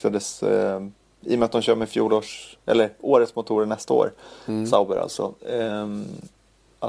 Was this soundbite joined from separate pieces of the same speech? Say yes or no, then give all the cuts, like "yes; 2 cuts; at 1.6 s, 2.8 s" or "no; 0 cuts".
no; 0 cuts